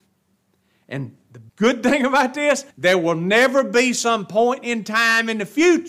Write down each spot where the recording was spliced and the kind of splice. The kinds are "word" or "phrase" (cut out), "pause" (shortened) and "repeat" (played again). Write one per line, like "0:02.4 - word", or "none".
0:01.5 - pause
0:02.7 - pause